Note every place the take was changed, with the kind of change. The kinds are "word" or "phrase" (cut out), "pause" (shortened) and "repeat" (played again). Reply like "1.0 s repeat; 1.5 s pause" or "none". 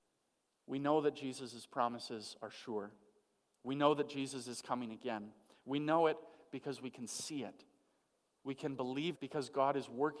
9.1 s word

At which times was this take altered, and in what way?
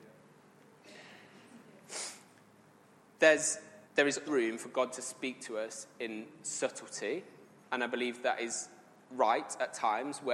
3.8 s pause; 4.2 s word

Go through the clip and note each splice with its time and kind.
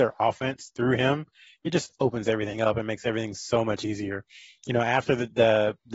none

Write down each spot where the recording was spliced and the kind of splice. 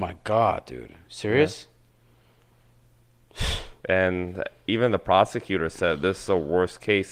none

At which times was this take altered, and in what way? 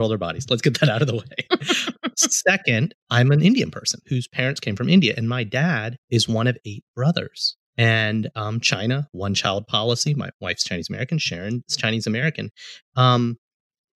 3.0 s pause; 6.0 s pause; 7.7 s pause

